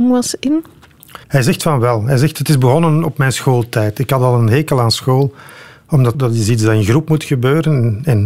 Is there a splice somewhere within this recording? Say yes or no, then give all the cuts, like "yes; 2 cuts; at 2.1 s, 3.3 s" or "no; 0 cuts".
yes; 2 cuts; at 1.2 s, 6.1 s